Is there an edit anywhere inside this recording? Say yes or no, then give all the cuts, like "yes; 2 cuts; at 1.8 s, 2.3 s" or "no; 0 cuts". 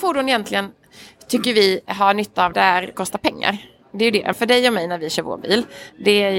yes; 3 cuts; at 2.5 s, 2.9 s, 4.3 s